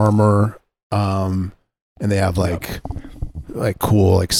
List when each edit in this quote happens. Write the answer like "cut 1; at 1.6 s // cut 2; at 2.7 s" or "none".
none